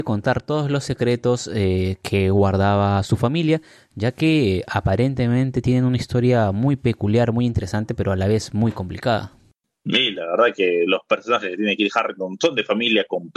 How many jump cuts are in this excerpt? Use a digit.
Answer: 0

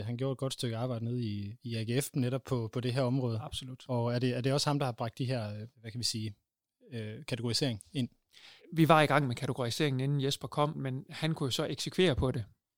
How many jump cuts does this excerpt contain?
3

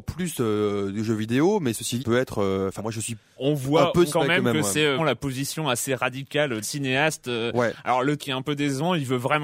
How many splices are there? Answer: 7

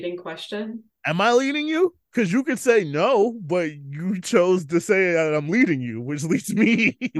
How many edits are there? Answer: 0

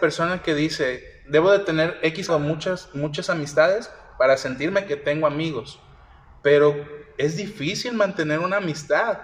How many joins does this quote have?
1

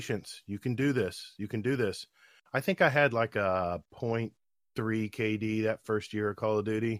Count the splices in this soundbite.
1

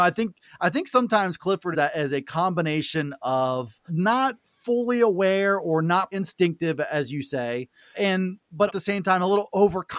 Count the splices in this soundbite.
5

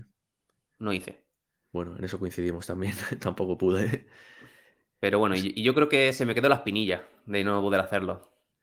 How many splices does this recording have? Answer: 1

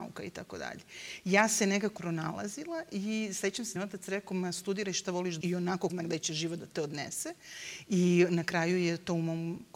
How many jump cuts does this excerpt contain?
4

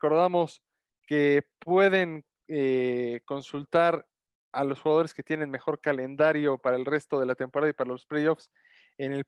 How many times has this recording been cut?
0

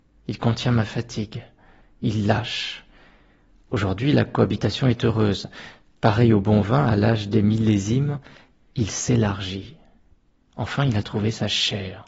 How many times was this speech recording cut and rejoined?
0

